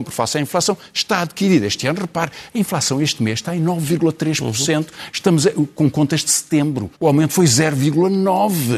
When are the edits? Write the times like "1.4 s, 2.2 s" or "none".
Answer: 6.9 s